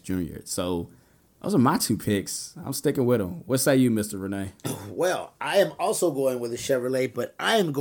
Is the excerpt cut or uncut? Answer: uncut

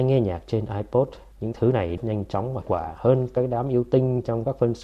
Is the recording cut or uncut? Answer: cut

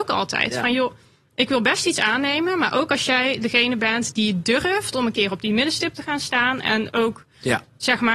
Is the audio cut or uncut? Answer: uncut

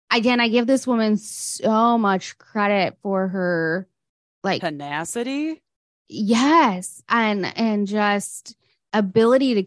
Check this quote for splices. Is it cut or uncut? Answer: uncut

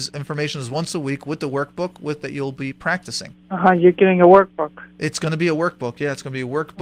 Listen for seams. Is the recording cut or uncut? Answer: cut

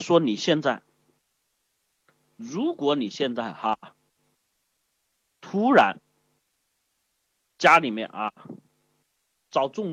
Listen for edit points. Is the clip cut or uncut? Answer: uncut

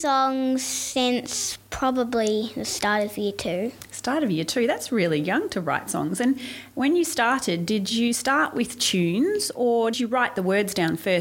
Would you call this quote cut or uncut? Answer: cut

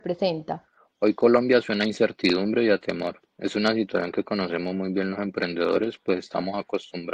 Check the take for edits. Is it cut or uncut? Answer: cut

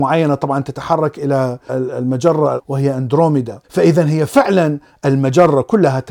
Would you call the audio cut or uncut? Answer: cut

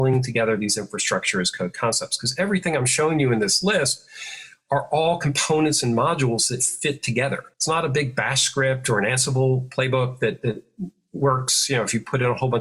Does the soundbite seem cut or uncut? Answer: cut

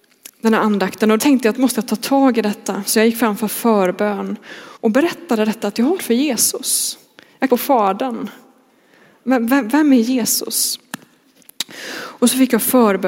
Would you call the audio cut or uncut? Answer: cut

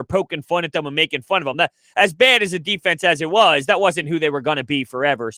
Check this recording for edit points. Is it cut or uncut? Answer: uncut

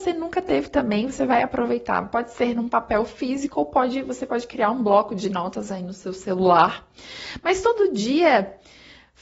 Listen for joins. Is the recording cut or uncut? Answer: uncut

